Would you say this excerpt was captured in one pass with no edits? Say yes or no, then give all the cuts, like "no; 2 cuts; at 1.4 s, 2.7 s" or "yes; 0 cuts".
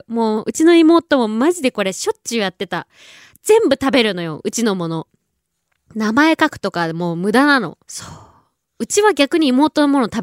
no; 1 cut; at 7.8 s